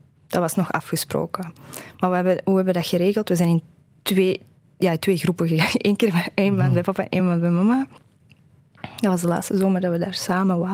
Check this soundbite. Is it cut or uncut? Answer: uncut